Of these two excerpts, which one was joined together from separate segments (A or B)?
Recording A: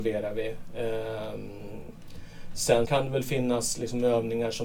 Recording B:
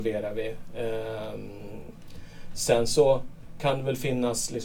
A